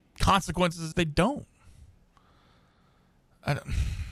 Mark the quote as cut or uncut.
cut